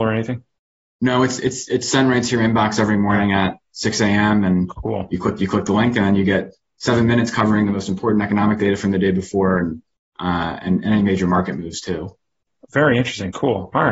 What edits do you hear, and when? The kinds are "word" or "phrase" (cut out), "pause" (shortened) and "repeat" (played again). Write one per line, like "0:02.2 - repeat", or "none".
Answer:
none